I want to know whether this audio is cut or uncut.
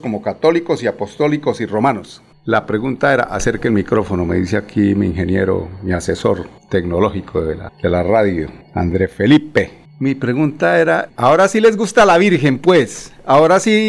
cut